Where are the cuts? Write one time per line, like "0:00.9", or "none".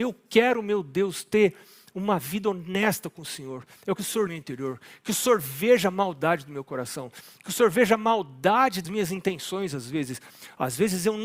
0:04.0
0:04.3
0:08.8